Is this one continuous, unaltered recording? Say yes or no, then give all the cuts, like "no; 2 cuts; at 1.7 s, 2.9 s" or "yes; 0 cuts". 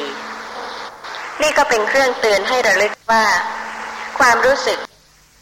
no; 1 cut; at 3.0 s